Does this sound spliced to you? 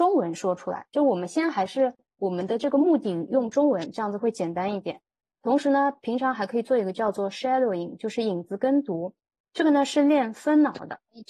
no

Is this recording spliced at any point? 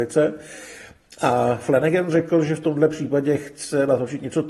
no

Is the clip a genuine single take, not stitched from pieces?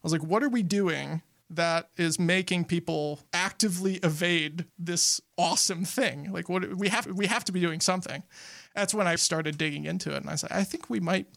no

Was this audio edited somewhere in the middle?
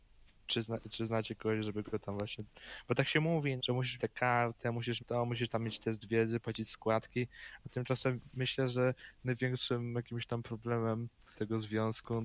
yes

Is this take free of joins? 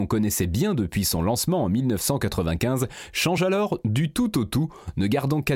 yes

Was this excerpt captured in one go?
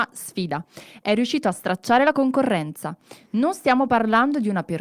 yes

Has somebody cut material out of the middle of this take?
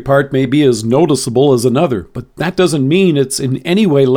no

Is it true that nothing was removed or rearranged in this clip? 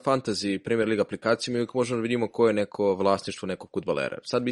yes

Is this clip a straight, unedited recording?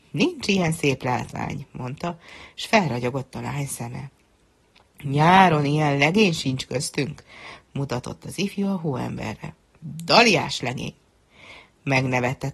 yes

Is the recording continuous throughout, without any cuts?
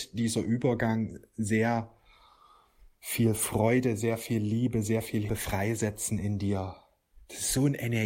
no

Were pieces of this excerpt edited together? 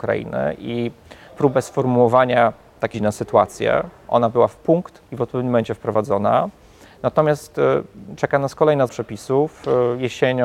yes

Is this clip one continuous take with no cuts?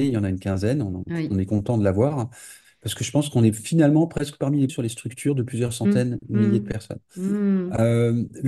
no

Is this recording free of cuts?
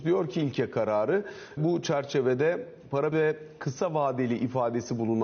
no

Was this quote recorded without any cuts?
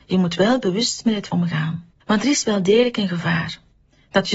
no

